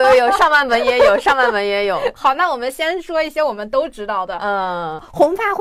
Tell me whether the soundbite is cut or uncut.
uncut